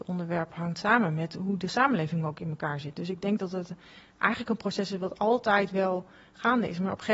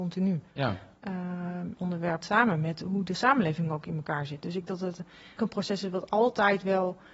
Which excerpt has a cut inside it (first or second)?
second